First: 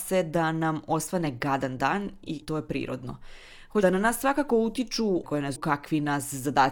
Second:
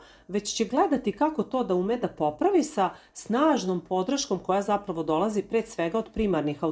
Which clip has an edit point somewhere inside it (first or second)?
first